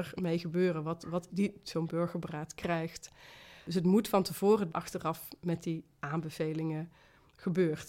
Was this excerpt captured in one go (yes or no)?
no